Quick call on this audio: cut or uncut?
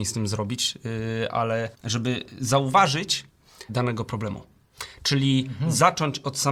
cut